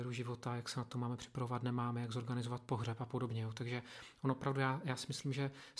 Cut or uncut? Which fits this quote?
uncut